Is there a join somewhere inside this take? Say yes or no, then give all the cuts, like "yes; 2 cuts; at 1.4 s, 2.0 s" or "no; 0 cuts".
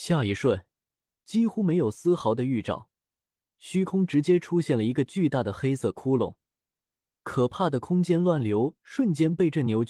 no; 0 cuts